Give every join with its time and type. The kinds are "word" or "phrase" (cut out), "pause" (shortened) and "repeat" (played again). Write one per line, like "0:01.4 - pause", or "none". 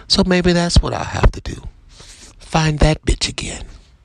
0:02.3 - pause